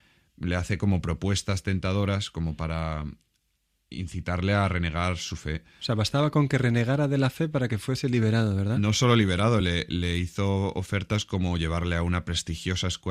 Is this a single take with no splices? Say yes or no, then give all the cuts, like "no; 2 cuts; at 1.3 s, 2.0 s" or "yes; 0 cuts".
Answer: yes; 0 cuts